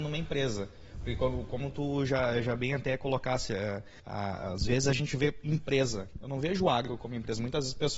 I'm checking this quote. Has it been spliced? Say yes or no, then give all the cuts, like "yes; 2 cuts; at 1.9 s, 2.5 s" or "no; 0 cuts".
yes; 1 cut; at 4.0 s